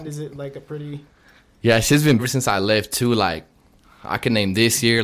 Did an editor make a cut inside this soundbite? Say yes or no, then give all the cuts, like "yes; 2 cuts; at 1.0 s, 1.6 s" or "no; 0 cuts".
yes; 1 cut; at 2.2 s